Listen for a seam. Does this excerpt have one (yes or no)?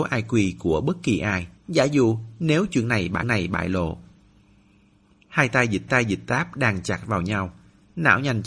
yes